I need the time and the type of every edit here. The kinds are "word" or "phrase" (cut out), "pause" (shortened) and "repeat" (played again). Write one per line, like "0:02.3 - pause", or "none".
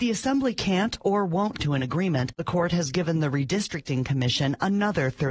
0:01.6 - word